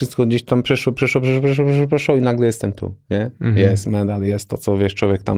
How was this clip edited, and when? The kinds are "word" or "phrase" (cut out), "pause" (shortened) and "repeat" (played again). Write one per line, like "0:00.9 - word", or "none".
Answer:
none